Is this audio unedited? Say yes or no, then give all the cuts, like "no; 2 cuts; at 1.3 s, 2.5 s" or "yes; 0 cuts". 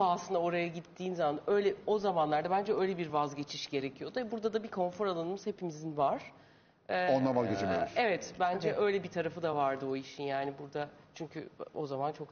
yes; 0 cuts